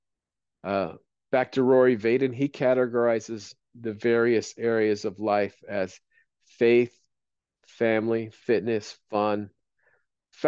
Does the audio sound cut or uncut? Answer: uncut